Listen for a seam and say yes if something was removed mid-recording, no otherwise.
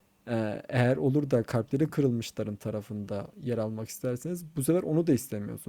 no